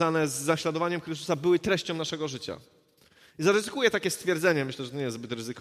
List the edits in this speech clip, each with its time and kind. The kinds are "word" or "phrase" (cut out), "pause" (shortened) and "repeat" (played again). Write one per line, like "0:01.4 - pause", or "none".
none